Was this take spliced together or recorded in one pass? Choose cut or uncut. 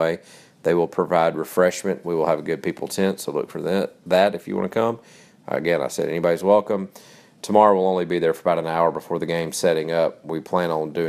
uncut